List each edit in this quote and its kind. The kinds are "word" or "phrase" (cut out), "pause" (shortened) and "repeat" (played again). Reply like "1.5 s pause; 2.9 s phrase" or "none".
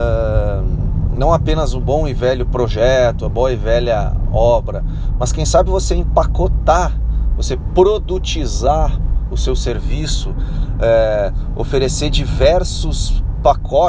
none